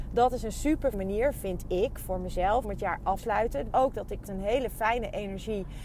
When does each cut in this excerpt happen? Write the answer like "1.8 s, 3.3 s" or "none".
0.9 s, 2.6 s, 3.2 s, 3.7 s, 4.2 s